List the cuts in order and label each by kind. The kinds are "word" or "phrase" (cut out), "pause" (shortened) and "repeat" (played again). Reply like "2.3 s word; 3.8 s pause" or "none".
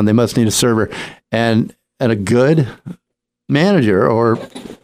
none